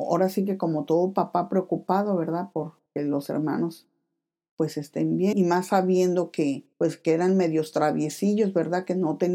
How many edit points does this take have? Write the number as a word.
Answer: three